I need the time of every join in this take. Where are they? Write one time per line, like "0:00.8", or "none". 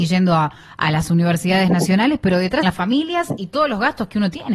0:02.6